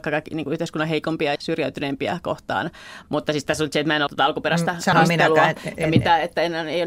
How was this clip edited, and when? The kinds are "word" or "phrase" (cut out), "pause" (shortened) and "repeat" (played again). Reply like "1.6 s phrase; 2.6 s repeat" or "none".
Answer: 1.4 s word; 4.1 s word; 4.9 s word